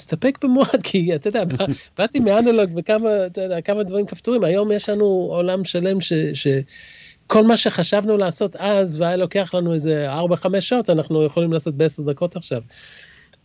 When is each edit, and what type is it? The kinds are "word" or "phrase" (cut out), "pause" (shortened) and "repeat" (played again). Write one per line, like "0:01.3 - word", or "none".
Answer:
none